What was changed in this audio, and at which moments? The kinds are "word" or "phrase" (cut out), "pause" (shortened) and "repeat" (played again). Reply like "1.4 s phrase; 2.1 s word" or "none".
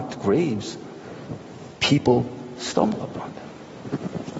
none